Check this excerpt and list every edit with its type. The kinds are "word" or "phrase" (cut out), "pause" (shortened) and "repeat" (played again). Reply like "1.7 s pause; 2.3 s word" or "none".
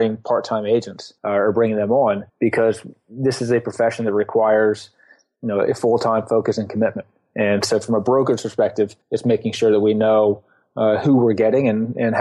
1.2 s pause; 2.3 s pause; 9.0 s pause